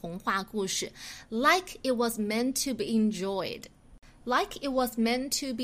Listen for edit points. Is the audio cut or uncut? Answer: uncut